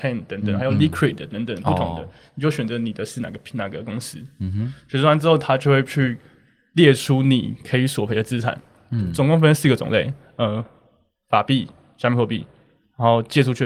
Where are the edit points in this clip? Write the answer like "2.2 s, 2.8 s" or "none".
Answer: none